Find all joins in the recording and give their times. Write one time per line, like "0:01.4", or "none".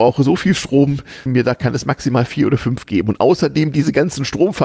0:01.3